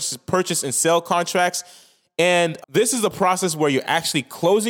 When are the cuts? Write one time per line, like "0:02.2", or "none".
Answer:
0:02.6